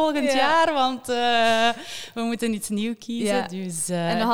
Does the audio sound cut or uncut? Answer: uncut